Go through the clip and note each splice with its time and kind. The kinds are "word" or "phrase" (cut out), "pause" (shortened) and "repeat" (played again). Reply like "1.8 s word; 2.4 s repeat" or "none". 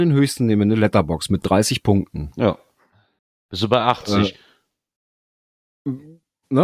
none

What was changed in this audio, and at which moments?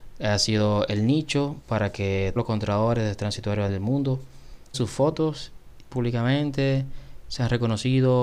2.4 s word; 3.7 s word; 4.7 s word; 5.9 s word

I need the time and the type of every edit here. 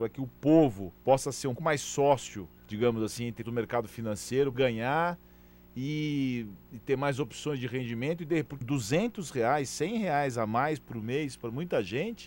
1.0 s pause; 1.6 s word; 2.6 s pause; 3.4 s word; 4.5 s phrase; 8.6 s word

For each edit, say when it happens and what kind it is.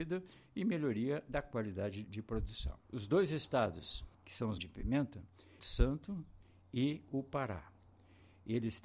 2.0 s word; 2.8 s pause; 4.1 s pause; 4.6 s phrase; 5.6 s phrase

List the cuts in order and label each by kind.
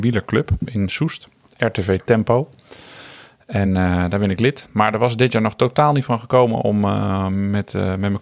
none

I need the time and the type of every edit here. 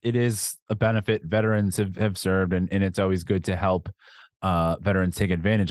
none

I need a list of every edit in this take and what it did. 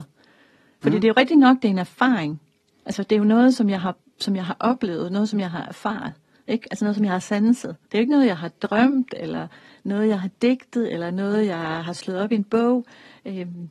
7.8 s pause

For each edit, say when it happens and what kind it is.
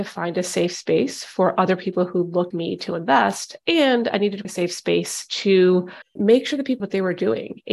2.5 s word; 4.4 s word; 6.8 s word

